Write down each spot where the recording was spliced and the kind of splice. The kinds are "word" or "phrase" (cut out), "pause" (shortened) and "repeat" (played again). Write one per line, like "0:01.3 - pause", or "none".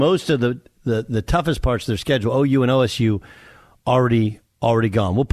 none